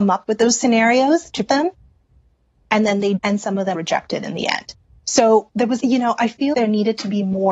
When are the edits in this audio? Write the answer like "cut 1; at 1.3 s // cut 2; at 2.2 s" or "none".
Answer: cut 1; at 1.5 s // cut 2; at 3.2 s // cut 3; at 3.7 s // cut 4; at 5.8 s // cut 5; at 6.5 s

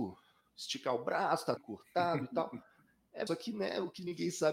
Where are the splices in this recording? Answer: cut 1; at 1.6 s // cut 2; at 3.3 s

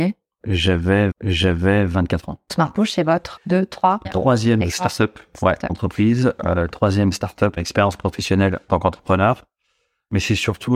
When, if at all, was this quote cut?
cut 1; at 1.1 s // cut 2; at 2.5 s // cut 3; at 3.4 s // cut 4; at 4.0 s // cut 5; at 4.6 s // cut 6; at 5.7 s // cut 7; at 7.6 s // cut 8; at 8.7 s

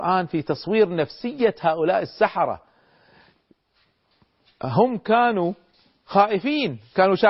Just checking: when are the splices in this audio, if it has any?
none

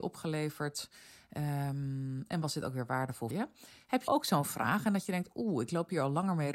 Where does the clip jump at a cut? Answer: cut 1; at 3.3 s // cut 2; at 4.1 s

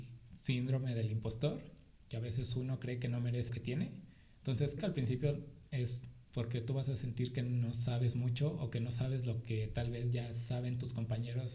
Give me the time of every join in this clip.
cut 1; at 3.5 s // cut 2; at 4.8 s // cut 3; at 6.3 s

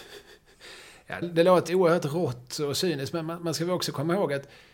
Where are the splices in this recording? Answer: cut 1; at 1.2 s // cut 2; at 1.7 s

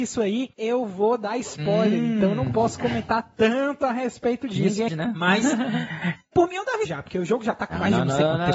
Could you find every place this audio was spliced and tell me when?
cut 1; at 4.9 s // cut 2; at 6.8 s

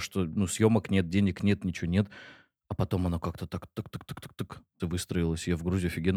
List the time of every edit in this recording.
cut 1; at 4.8 s

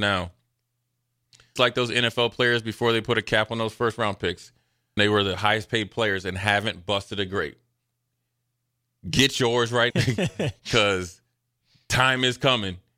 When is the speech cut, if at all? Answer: cut 1; at 1.6 s // cut 2; at 5.0 s // cut 3; at 9.9 s

